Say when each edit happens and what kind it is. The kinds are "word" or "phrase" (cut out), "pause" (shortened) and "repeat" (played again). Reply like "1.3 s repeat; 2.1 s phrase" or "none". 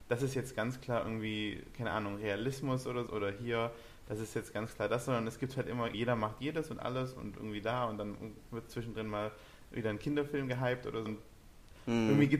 3.1 s word; 5.9 s word; 11.1 s word